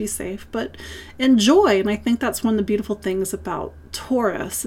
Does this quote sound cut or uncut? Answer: uncut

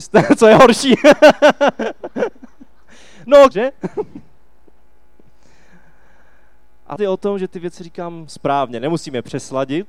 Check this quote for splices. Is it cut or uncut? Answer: cut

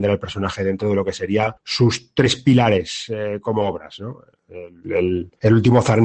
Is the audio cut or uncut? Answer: uncut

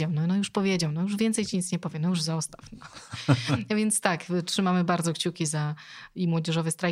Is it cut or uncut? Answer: uncut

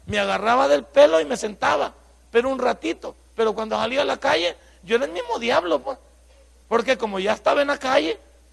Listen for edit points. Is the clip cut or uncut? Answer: uncut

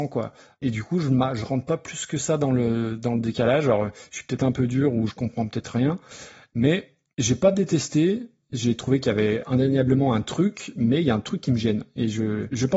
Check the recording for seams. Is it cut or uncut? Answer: uncut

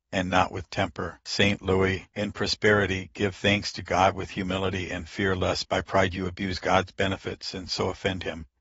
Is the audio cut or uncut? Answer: uncut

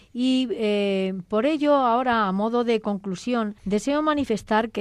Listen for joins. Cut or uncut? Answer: cut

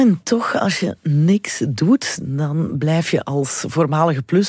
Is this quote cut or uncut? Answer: uncut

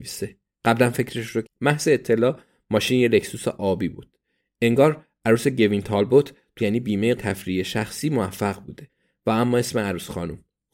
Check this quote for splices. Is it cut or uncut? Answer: cut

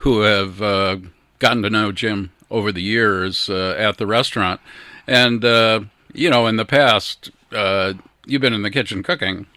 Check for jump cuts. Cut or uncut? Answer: uncut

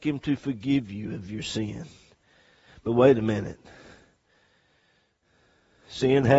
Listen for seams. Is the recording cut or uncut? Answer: uncut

